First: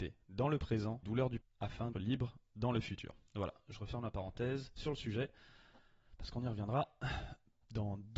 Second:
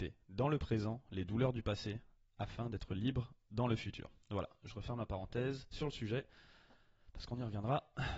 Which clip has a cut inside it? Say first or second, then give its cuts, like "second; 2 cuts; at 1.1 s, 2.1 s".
first; 3 cuts; at 1.0 s, 1.4 s, 1.9 s